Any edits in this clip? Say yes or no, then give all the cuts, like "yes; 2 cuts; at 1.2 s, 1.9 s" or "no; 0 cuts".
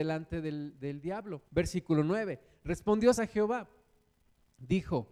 yes; 2 cuts; at 1.5 s, 3.1 s